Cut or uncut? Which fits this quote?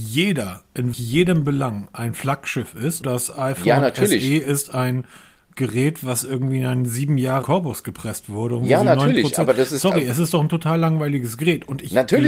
cut